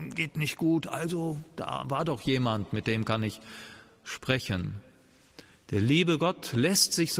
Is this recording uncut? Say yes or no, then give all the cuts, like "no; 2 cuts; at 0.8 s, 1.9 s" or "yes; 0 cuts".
yes; 0 cuts